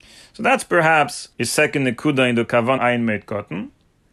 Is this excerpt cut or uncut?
cut